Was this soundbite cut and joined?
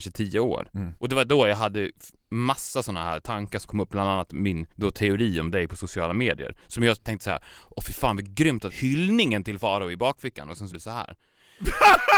yes; 5 cuts; at 1.0 s, 3.7 s, 4.7 s, 8.7 s, 10.7 s

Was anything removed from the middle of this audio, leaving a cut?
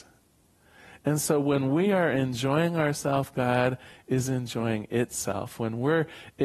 no; 0 cuts

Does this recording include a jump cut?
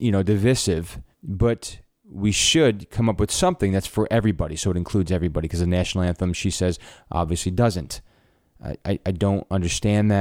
yes; 1 cut; at 1.1 s

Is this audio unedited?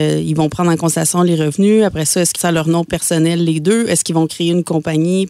no; 1 cut; at 2.3 s

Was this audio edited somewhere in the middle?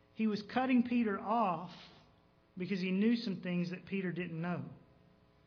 no; 0 cuts

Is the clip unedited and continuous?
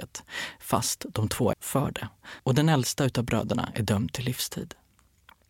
no; 1 cut; at 1.5 s

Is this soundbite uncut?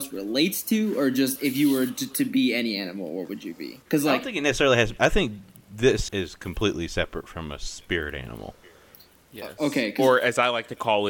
no; 2 cuts; at 3.8 s, 6.1 s

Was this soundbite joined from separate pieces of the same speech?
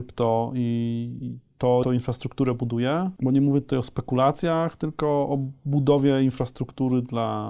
yes; 1 cut; at 1.8 s

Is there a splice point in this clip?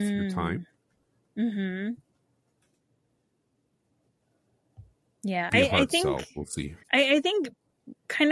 yes; 2 cuts; at 5.5 s, 6.8 s

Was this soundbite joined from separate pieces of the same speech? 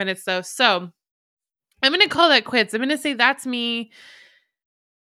no; 0 cuts

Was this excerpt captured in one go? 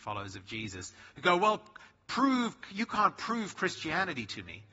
yes; 0 cuts

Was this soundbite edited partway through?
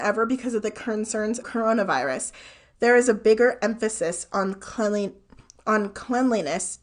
yes; 1 cut; at 1.4 s

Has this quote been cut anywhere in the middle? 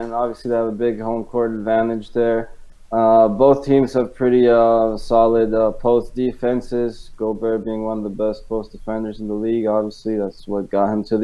no; 0 cuts

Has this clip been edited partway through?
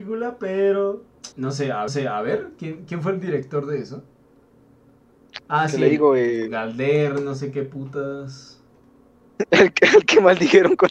yes; 2 cuts; at 1.3 s, 1.9 s

